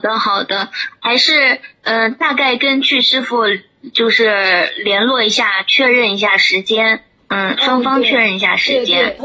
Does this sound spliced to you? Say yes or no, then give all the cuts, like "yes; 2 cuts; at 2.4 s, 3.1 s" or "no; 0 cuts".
no; 0 cuts